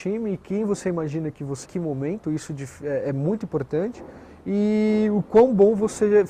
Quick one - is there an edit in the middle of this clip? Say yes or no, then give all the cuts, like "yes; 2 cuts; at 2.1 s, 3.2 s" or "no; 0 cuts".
yes; 1 cut; at 1.6 s